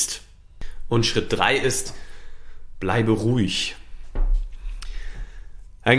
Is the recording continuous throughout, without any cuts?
yes; 0 cuts

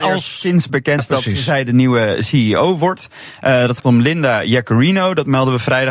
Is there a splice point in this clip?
yes; 2 cuts; at 1.0 s, 3.8 s

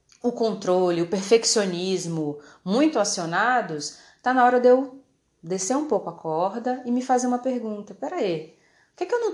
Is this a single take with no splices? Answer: yes; 0 cuts

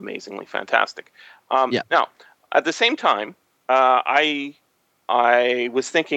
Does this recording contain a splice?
no; 0 cuts

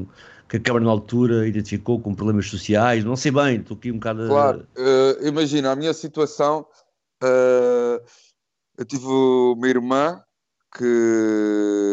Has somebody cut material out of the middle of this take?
no; 0 cuts

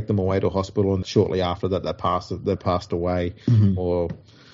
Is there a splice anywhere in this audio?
yes; 3 cuts; at 1.0 s, 2.6 s, 3.4 s

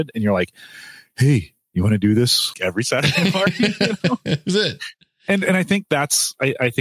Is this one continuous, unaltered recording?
no; 1 cut; at 2.5 s

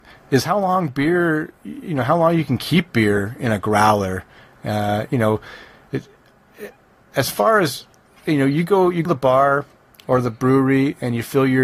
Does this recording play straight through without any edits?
no; 1 cut; at 9.1 s

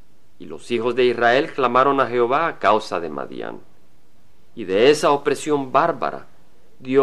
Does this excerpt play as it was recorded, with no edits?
yes; 0 cuts

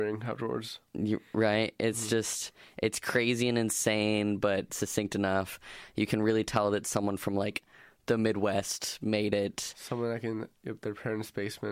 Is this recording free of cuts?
yes; 0 cuts

